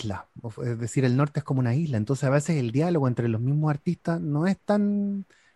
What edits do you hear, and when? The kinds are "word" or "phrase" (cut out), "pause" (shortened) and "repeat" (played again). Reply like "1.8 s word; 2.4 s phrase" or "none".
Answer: none